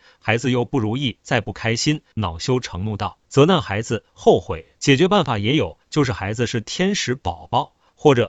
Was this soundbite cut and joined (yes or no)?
yes